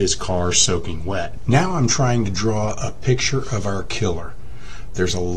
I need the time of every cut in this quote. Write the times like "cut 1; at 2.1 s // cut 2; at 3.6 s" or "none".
none